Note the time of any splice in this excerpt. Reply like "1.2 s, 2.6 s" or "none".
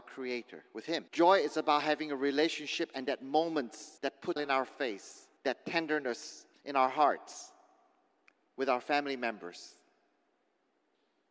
1.1 s, 4.0 s, 4.4 s, 5.4 s, 6.5 s